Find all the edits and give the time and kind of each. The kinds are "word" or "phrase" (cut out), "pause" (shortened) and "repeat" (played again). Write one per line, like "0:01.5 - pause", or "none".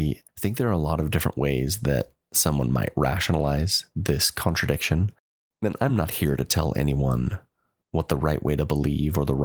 none